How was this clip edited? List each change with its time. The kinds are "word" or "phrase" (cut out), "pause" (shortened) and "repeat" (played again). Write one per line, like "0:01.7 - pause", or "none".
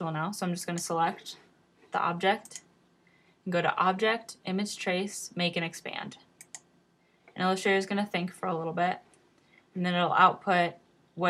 none